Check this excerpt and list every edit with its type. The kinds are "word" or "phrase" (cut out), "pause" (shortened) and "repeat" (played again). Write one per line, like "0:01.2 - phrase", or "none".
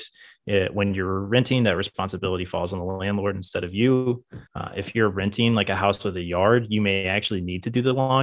0:04.5 - pause